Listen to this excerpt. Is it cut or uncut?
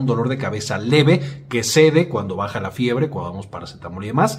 uncut